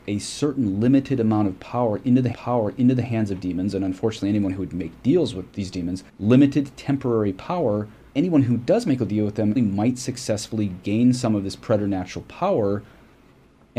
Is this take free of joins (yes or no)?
no